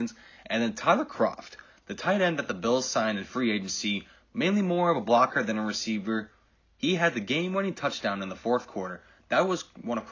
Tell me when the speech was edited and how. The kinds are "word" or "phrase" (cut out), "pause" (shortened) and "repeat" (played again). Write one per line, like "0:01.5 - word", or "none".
none